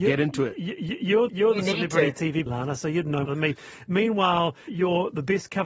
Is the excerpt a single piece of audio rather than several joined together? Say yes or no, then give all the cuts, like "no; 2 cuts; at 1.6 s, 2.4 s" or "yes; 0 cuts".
no; 4 cuts; at 1.3 s, 2.5 s, 3.2 s, 4.7 s